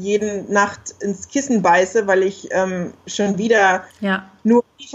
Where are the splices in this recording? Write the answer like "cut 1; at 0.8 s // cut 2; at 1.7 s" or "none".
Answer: cut 1; at 3.9 s